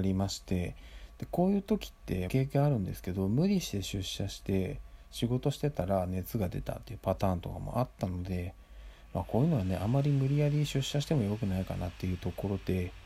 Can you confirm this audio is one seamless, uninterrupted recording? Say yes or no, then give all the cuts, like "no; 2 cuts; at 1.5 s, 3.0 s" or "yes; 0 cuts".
no; 1 cut; at 2.3 s